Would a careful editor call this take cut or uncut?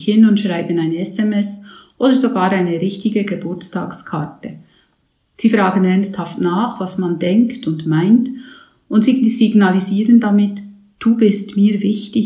uncut